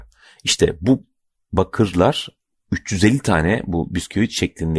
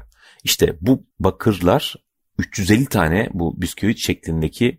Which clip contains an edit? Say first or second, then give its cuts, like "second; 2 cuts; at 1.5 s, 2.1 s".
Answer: second; 1 cut; at 1.1 s